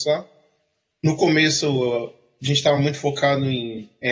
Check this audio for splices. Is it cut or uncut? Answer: uncut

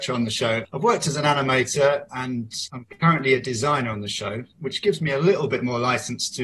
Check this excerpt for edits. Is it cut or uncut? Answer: uncut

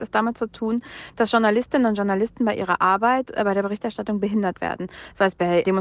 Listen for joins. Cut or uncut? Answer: uncut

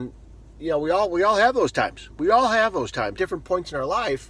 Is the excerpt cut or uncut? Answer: cut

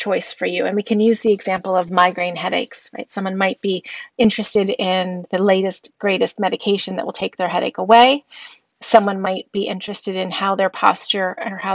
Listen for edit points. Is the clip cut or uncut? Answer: uncut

